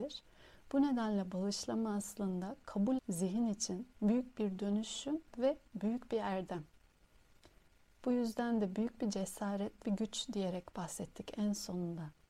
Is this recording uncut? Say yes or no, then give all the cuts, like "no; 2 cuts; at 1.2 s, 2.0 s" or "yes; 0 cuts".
no; 4 cuts; at 3.0 s, 3.9 s, 5.3 s, 9.8 s